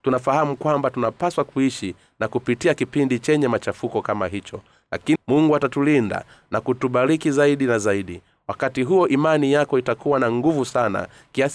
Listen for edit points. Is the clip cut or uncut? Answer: cut